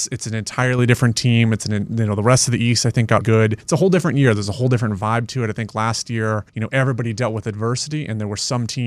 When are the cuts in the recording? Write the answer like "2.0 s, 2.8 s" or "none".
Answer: 3.2 s